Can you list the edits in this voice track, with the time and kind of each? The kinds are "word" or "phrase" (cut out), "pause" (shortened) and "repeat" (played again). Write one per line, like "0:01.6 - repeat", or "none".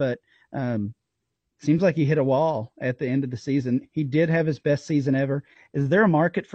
none